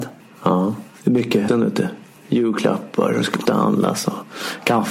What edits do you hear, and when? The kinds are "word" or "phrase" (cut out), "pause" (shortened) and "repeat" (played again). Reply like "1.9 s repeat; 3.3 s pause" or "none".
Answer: 1.5 s word; 3.5 s word

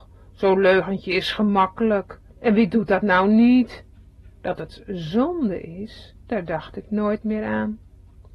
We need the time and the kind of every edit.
2.3 s pause; 6.2 s pause

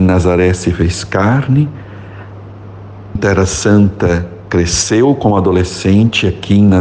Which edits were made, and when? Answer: 3.2 s word

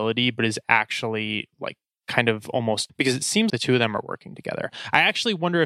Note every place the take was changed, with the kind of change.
2.9 s word; 3.5 s word

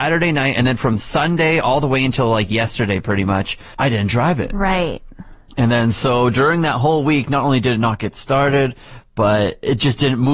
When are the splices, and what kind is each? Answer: 3.7 s pause

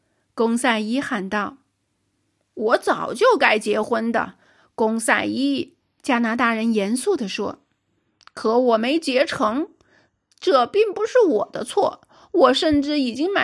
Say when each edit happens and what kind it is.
5.8 s pause

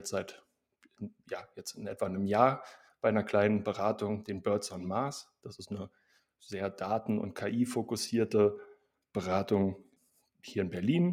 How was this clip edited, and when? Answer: none

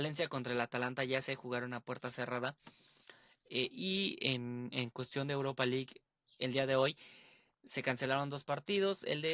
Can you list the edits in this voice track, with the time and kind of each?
none

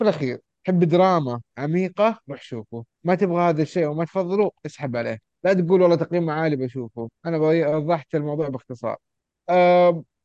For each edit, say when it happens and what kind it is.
2.9 s pause; 7.1 s pause

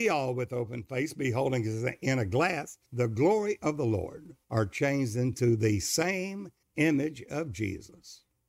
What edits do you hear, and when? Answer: 2.8 s pause; 4.4 s pause; 6.6 s pause

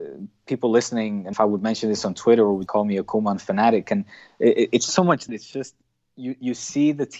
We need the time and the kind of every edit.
1.3 s word; 2.7 s word; 4.9 s word; 5.3 s word

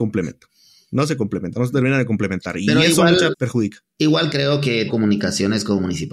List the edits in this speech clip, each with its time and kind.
3.3 s word; 4.9 s word

